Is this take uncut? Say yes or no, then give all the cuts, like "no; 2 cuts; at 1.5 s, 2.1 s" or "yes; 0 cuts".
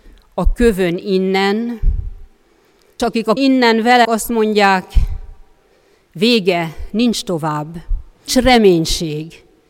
no; 4 cuts; at 3.0 s, 3.4 s, 4.0 s, 8.3 s